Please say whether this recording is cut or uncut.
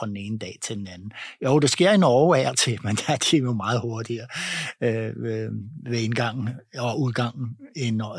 uncut